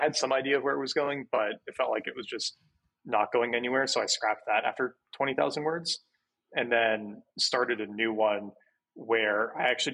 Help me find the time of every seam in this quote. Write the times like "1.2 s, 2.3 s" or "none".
none